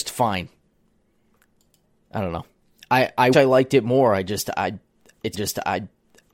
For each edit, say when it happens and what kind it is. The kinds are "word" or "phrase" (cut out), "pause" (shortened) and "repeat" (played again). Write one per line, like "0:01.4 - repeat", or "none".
0:03.3 - word
0:05.3 - repeat